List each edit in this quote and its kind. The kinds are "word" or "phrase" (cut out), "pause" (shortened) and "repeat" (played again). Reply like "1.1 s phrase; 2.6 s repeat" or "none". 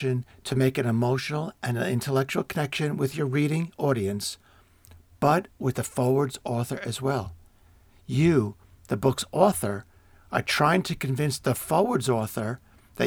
none